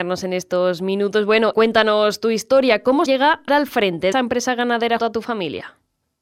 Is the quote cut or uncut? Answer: cut